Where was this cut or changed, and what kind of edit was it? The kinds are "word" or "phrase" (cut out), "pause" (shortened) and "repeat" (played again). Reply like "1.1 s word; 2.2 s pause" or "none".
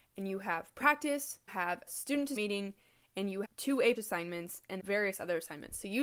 1.5 s word; 1.9 s word; 2.4 s word; 3.4 s word; 4.0 s word; 4.8 s word